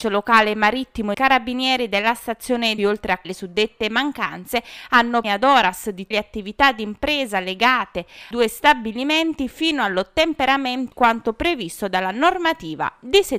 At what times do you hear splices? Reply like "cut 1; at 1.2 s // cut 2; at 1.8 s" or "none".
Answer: cut 1; at 1.1 s // cut 2; at 2.8 s // cut 3; at 3.2 s // cut 4; at 5.2 s // cut 5; at 6.1 s // cut 6; at 8.3 s // cut 7; at 10.9 s

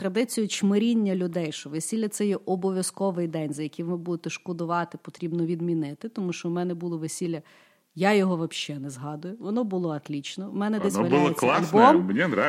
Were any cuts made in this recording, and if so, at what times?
none

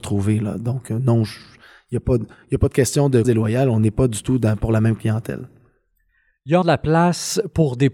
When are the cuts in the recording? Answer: cut 1; at 3.2 s // cut 2; at 6.6 s

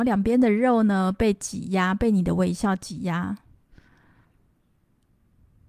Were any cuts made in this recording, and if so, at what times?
none

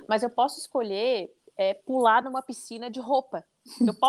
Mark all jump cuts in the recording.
none

